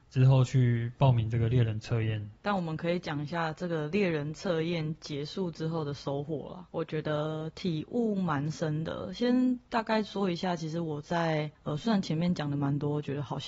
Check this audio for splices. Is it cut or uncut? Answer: cut